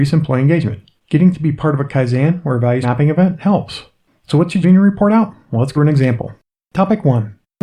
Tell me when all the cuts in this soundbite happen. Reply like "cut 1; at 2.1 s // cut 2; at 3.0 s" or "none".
cut 1; at 1.0 s // cut 2; at 2.8 s // cut 3; at 4.6 s // cut 4; at 5.7 s